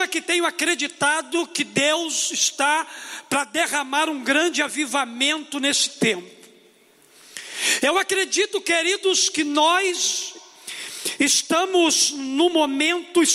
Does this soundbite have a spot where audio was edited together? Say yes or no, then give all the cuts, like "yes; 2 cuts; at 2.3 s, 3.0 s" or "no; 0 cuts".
no; 0 cuts